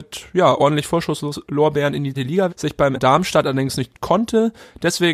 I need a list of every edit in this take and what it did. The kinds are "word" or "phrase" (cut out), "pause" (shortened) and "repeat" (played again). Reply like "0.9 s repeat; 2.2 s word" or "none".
2.1 s word; 2.5 s word; 2.9 s word; 3.9 s word

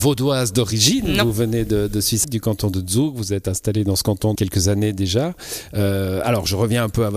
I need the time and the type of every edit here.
2.2 s word; 4.4 s word

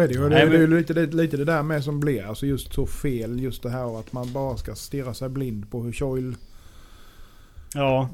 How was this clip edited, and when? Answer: none

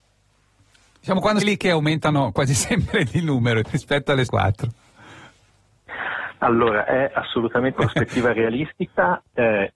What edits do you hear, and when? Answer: 1.4 s phrase; 3.6 s word; 4.3 s word; 7.7 s word

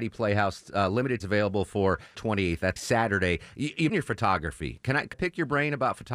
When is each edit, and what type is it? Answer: 1.2 s word; 2.1 s word; 2.8 s word; 3.9 s word; 5.1 s word

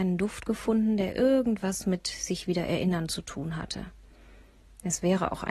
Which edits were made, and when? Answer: none

